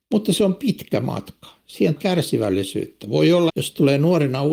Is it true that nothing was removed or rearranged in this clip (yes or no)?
no